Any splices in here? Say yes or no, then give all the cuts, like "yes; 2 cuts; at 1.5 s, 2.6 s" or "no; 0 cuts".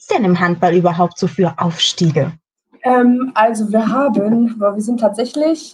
no; 0 cuts